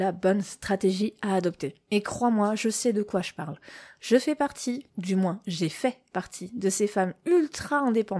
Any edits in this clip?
yes; 1 cut; at 4.9 s

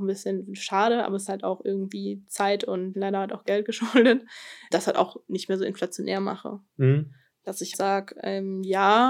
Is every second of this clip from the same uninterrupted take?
no; 4 cuts; at 1.3 s, 2.9 s, 4.7 s, 7.7 s

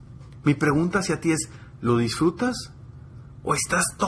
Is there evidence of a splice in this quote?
no; 0 cuts

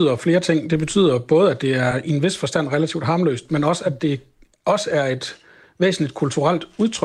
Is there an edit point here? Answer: no; 0 cuts

